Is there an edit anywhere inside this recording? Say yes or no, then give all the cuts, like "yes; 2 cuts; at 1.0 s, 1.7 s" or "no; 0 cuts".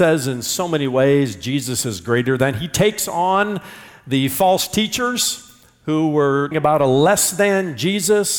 yes; 1 cut; at 6.5 s